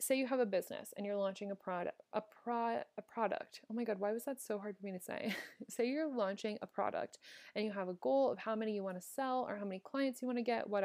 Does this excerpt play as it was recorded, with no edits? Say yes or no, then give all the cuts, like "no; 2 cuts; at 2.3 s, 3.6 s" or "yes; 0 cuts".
yes; 0 cuts